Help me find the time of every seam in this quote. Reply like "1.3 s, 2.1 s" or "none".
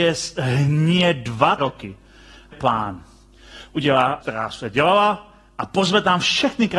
1.6 s, 2.5 s, 4.2 s